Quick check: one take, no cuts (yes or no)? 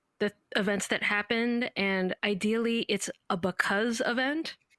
no